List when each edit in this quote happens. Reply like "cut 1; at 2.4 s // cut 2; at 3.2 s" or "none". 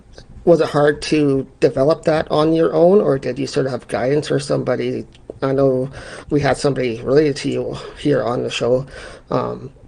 cut 1; at 6.2 s